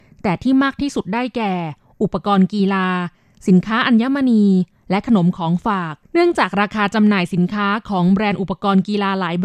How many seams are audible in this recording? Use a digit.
1